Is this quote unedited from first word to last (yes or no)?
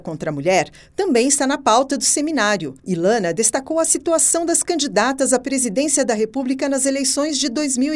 no